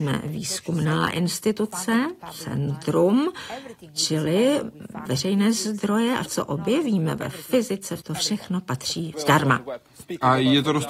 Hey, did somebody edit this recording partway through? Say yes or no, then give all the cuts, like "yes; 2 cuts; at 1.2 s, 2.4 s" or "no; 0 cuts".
yes; 4 cuts; at 5.0 s, 6.2 s, 8.0 s, 9.1 s